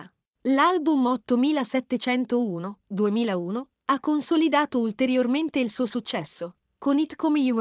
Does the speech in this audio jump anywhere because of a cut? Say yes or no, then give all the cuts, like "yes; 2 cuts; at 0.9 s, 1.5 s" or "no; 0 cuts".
no; 0 cuts